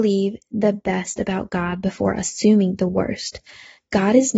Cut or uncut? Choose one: uncut